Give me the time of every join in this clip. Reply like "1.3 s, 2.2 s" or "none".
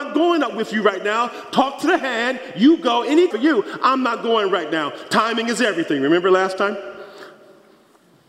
3.3 s